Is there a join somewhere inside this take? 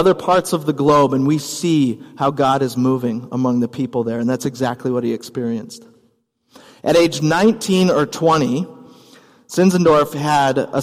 no; 0 cuts

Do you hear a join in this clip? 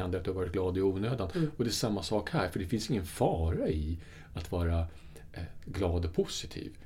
no; 0 cuts

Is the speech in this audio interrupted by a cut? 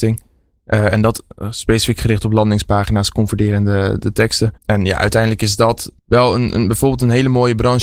yes; 2 cuts; at 4.6 s, 6.0 s

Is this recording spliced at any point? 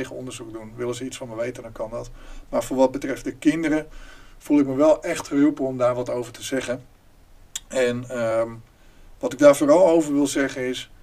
no; 0 cuts

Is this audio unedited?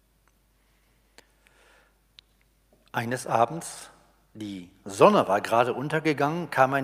yes; 0 cuts

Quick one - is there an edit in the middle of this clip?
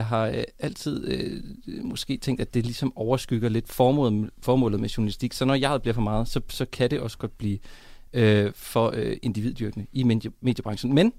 no; 0 cuts

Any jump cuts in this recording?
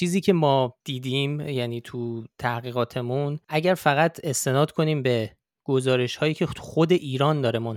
no; 0 cuts

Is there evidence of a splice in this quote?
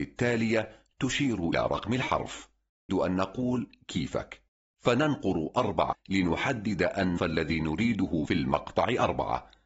yes; 5 cuts; at 1.5 s, 2.9 s, 5.9 s, 7.2 s, 8.2 s

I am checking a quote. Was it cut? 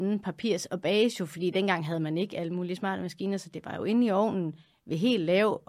no; 0 cuts

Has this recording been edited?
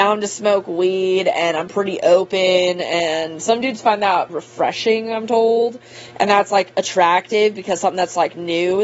yes; 1 cut; at 4.3 s

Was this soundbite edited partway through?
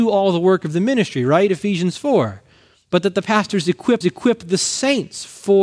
yes; 1 cut; at 4.0 s

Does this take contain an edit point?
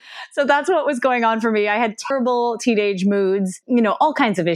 yes; 1 cut; at 2.1 s

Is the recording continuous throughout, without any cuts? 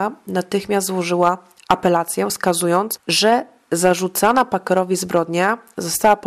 yes; 0 cuts

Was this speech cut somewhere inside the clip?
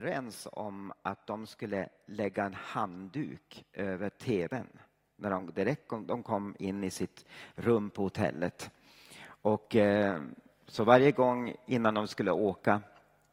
no; 0 cuts

